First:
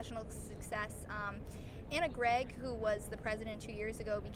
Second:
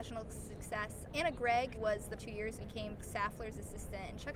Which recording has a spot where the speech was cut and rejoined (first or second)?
second